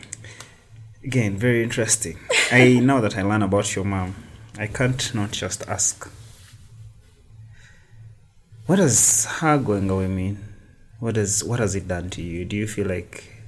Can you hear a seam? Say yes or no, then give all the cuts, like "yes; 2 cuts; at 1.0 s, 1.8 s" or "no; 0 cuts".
no; 0 cuts